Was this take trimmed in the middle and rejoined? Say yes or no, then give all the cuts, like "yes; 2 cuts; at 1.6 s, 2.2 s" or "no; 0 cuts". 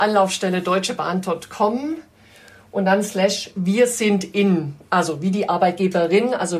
no; 0 cuts